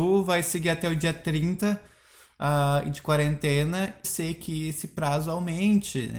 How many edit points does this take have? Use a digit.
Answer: 1